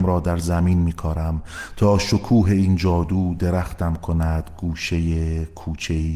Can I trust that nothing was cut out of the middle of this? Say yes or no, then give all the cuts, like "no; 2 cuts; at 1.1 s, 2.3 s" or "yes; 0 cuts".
yes; 0 cuts